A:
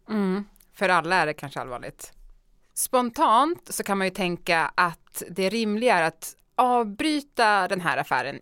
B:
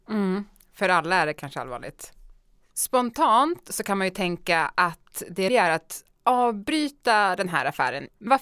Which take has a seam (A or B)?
B